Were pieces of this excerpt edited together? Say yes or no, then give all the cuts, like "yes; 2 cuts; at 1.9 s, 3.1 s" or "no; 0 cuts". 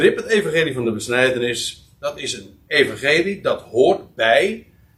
no; 0 cuts